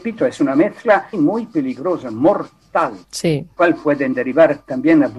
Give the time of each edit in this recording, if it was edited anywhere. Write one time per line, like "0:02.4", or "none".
0:01.1
0:03.0
0:03.6